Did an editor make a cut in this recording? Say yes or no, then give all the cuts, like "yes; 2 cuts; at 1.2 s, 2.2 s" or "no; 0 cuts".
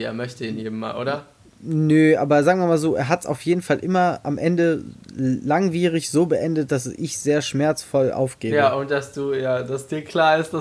no; 0 cuts